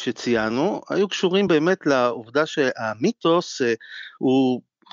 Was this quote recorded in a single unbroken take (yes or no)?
yes